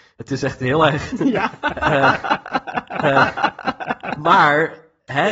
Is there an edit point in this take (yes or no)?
yes